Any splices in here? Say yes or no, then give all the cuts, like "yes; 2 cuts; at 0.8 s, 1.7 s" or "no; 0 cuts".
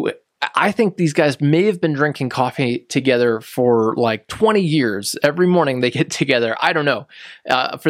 no; 0 cuts